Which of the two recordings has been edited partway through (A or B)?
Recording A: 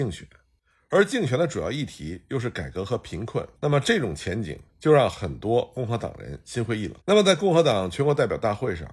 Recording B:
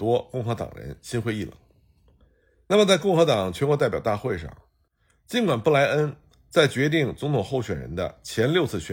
A